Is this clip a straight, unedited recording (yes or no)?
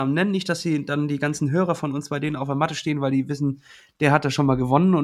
yes